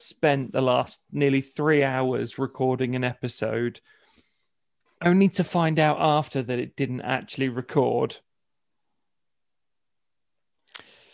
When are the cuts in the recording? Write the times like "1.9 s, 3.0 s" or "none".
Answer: none